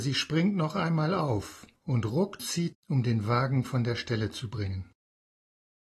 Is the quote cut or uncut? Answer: cut